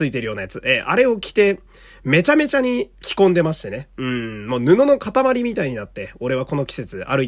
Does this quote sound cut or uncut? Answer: uncut